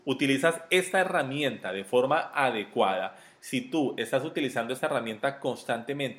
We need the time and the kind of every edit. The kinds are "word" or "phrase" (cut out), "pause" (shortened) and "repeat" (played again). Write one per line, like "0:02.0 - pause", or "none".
none